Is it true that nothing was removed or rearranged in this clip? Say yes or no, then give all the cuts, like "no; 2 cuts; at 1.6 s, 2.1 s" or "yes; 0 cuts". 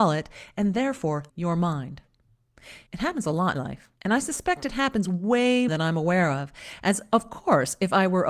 no; 5 cuts; at 1.3 s, 2.9 s, 3.6 s, 4.0 s, 5.7 s